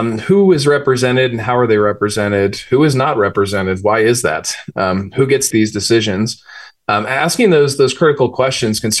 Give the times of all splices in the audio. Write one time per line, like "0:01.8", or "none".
0:05.5